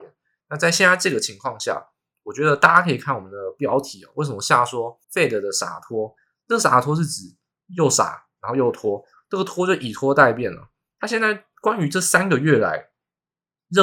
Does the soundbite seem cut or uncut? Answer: cut